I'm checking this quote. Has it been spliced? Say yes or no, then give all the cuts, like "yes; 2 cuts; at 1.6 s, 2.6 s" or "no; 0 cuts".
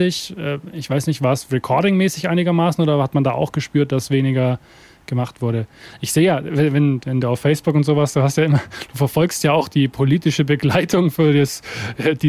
no; 0 cuts